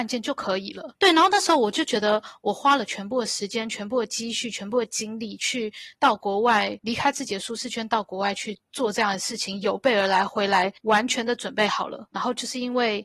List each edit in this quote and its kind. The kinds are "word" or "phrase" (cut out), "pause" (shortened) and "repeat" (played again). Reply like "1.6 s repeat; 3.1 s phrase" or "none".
10.8 s pause